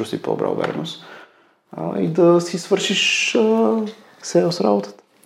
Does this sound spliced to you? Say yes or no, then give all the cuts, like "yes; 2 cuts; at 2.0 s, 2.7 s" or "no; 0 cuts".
no; 0 cuts